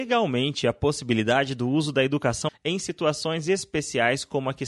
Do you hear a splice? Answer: yes; 1 cut; at 2.5 s

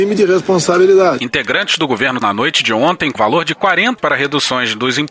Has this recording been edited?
yes; 3 cuts; at 2.2 s, 3.2 s, 4.0 s

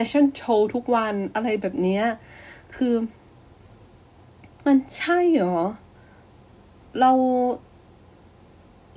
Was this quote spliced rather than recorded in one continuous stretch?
no; 0 cuts

